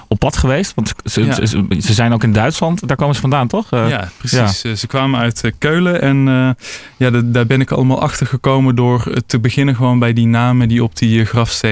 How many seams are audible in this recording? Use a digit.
0